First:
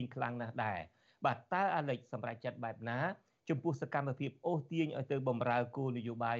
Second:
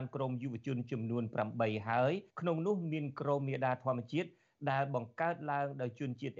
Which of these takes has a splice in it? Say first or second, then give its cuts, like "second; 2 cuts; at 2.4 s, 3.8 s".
second; 1 cut; at 2.3 s